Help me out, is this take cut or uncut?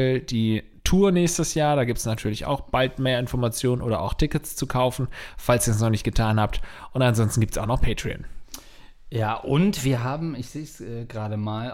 uncut